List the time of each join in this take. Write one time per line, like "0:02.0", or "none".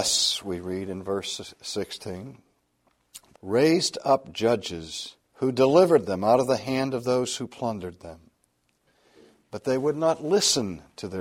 0:03.4
0:05.2